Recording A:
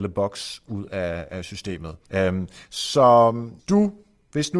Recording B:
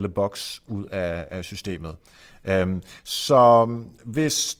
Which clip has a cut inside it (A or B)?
A